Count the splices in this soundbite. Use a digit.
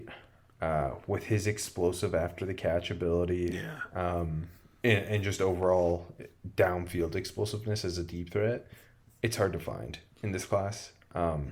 0